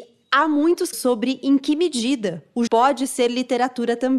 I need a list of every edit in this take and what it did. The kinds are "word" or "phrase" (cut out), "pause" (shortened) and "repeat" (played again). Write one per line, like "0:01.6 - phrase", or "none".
0:00.9 - word
0:02.7 - word